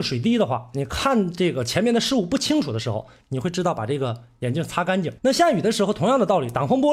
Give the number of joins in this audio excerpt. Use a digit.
1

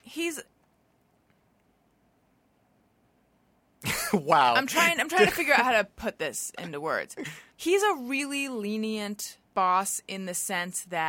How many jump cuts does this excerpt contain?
2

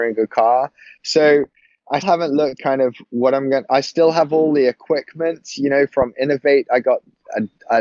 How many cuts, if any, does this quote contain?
2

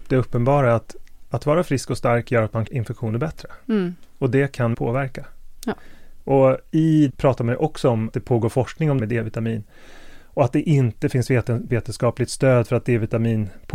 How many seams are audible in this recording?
6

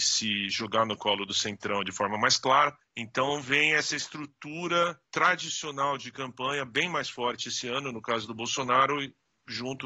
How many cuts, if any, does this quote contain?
2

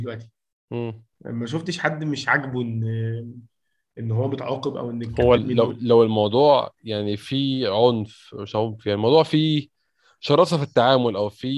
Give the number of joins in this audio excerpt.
2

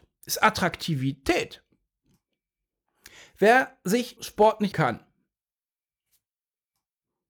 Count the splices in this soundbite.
2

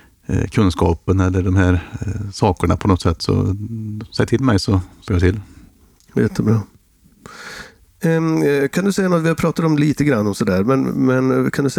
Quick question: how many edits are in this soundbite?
1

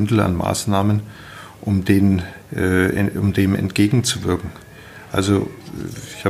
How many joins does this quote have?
1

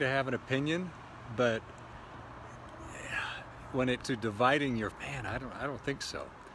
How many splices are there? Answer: 2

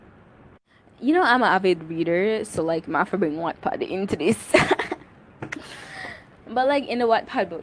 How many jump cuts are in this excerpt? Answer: 0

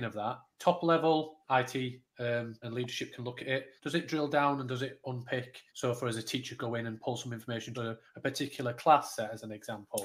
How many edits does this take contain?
6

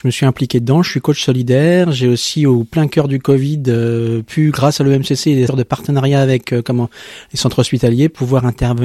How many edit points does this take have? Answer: 1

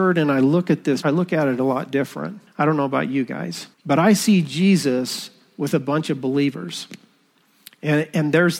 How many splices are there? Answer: 3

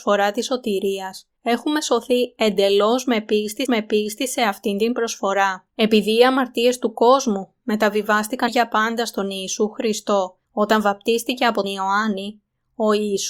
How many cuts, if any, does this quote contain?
6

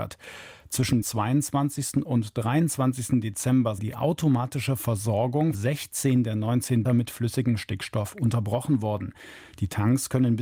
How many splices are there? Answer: 4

